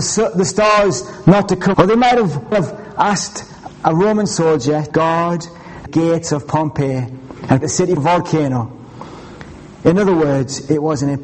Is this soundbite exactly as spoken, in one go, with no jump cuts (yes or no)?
no